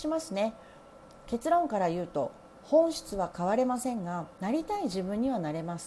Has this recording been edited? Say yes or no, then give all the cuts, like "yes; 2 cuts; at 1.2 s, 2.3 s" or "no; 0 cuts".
yes; 1 cut; at 4.4 s